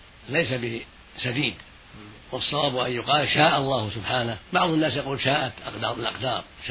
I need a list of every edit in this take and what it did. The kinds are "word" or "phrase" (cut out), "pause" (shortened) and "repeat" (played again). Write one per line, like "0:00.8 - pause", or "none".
0:04.4 - pause

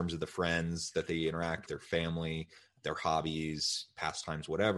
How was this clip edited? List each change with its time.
0:01.7 - word

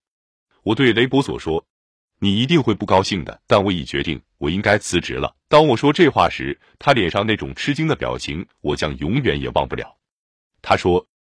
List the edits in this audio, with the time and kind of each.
0:03.4 - pause
0:05.4 - pause

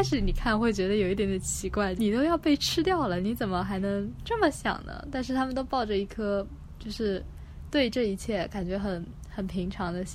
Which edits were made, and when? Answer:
0:02.0 - phrase

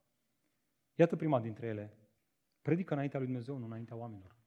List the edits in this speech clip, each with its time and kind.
0:02.2 - pause

